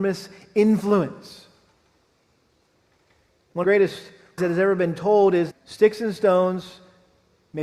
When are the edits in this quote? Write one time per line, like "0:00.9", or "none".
0:03.6
0:04.4
0:05.5